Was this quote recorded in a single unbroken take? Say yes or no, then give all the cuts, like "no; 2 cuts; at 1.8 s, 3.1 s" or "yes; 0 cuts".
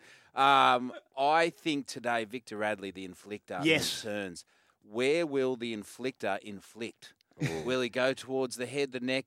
yes; 0 cuts